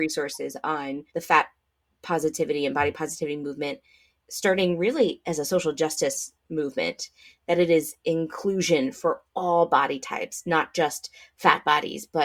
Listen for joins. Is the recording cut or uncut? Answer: cut